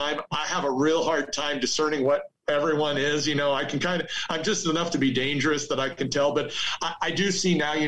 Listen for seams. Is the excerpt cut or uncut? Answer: uncut